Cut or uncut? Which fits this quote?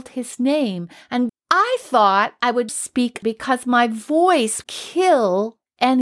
cut